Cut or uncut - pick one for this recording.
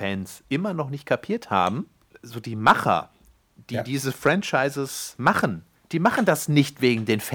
uncut